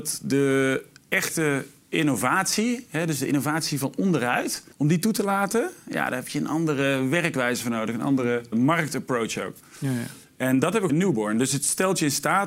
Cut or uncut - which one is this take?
cut